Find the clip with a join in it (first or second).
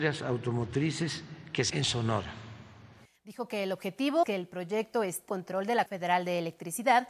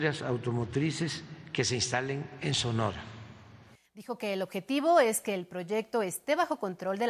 first